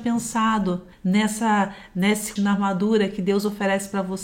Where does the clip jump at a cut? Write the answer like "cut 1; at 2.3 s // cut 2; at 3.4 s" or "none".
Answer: cut 1; at 0.9 s // cut 2; at 2.4 s